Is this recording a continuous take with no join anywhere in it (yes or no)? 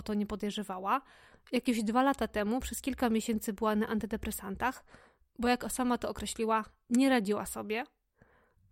yes